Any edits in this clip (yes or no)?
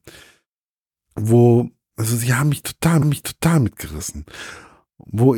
yes